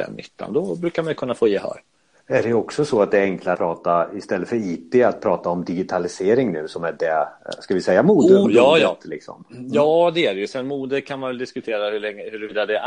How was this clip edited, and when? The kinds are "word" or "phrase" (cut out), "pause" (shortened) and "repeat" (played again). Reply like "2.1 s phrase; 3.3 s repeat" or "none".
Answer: 3.5 s word; 8.4 s word